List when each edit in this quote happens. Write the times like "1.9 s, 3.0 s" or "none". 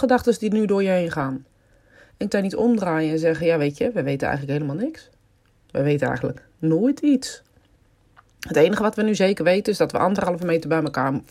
2.3 s